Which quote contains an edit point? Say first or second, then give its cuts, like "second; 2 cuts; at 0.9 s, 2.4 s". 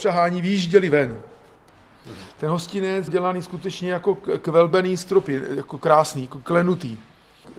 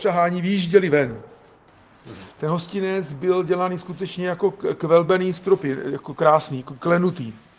first; 1 cut; at 3.1 s